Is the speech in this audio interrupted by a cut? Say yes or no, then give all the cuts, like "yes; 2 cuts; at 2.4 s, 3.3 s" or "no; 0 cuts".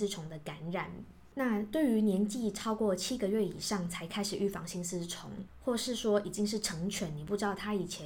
yes; 1 cut; at 1.3 s